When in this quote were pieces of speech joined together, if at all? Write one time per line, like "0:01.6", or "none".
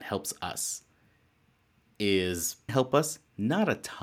0:02.7